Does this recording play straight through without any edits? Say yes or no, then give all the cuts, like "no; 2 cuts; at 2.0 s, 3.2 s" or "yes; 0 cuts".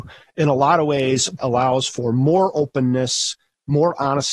no; 1 cut; at 1.4 s